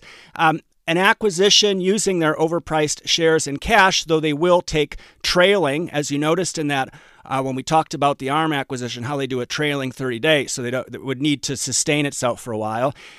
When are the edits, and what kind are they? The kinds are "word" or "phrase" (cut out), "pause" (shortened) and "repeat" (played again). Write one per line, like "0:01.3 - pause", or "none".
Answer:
none